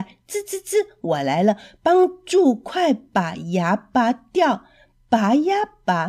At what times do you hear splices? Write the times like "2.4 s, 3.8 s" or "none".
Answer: none